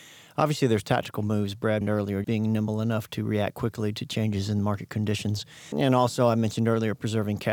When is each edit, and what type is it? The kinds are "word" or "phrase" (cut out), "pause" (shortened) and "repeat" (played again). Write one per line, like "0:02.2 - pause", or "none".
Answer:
0:01.8 - word
0:02.2 - word
0:05.7 - word

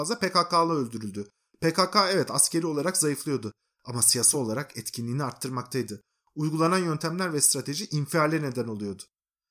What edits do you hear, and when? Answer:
none

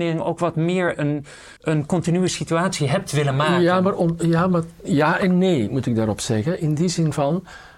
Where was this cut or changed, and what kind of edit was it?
0:01.6 - pause

